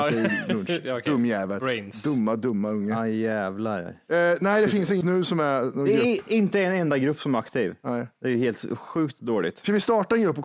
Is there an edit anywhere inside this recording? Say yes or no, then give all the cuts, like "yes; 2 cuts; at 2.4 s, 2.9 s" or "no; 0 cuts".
yes; 1 cut; at 5.0 s